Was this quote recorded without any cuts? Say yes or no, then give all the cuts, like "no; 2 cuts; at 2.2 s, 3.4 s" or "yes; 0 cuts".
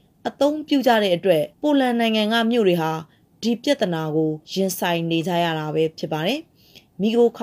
no; 2 cuts; at 1.5 s, 4.4 s